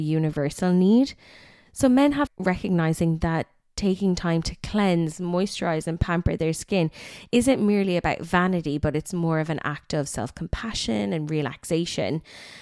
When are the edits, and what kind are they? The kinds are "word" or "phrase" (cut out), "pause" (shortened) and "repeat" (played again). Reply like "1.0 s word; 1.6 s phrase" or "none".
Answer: 2.3 s phrase